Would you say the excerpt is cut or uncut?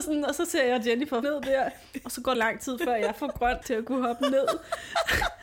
cut